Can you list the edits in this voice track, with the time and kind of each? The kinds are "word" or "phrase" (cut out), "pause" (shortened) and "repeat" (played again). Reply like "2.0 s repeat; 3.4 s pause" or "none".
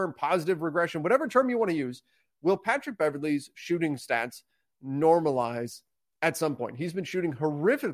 none